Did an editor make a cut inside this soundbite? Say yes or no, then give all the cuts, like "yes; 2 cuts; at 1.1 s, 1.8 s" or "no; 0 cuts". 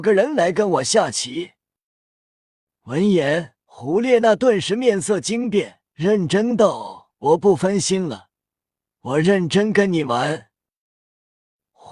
yes; 2 cuts; at 3.6 s, 5.9 s